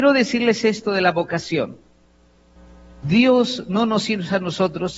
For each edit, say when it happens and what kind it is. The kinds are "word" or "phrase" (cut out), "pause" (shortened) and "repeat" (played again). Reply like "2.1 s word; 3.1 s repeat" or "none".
2.6 s pause